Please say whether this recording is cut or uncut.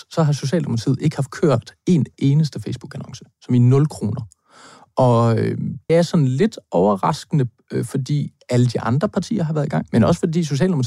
cut